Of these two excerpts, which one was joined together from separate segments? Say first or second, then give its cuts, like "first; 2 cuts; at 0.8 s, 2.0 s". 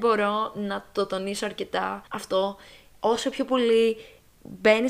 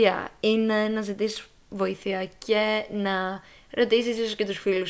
first; 1 cut; at 2.1 s